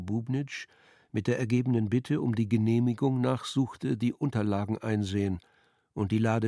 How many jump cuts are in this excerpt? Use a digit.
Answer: 0